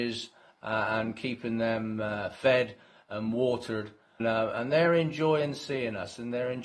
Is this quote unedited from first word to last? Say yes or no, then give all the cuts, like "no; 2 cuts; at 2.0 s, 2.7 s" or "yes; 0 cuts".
no; 1 cut; at 4.2 s